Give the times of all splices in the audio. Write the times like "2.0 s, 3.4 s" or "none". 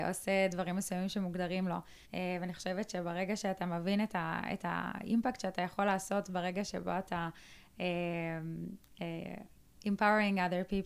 2.1 s